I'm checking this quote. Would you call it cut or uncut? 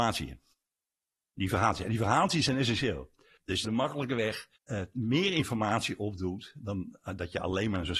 cut